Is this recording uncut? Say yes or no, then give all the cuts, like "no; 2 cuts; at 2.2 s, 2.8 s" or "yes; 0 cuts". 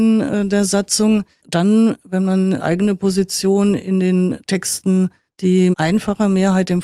no; 3 cuts; at 1.4 s, 2.6 s, 5.7 s